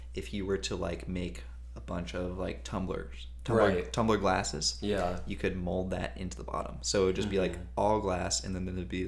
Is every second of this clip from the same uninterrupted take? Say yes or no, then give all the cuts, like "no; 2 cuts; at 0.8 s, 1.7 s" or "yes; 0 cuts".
yes; 0 cuts